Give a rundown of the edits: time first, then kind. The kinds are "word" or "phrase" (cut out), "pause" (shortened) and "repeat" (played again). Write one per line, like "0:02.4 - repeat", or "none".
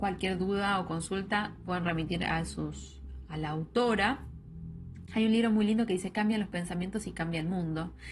none